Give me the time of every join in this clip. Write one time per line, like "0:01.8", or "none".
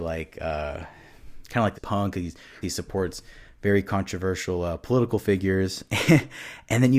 0:01.7
0:02.6